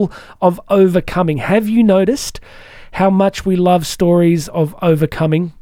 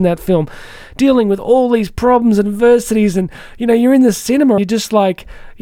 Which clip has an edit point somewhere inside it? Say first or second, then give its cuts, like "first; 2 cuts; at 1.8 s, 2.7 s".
second; 1 cut; at 4.6 s